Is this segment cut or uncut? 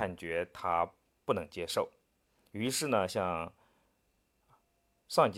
uncut